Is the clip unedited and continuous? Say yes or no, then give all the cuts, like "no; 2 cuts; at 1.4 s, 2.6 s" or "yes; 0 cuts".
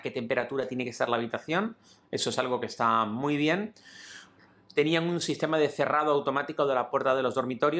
yes; 0 cuts